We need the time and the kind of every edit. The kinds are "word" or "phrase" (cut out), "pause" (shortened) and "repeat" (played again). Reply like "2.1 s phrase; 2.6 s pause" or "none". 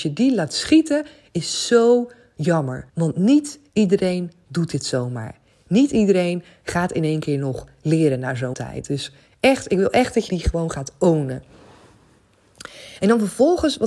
2.9 s pause; 8.5 s word; 10.3 s word